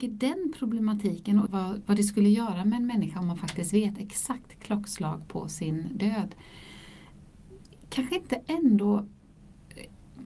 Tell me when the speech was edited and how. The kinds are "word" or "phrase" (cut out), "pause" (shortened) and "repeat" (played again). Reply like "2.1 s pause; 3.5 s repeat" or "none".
1.5 s phrase